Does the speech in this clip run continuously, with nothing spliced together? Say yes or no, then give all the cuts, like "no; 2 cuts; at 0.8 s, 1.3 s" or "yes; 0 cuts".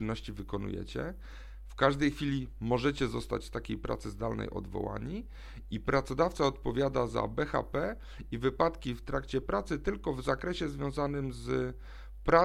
yes; 0 cuts